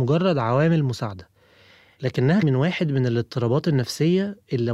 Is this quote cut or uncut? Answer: cut